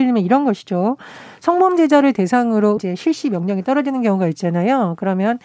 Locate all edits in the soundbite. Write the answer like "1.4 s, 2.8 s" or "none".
2.8 s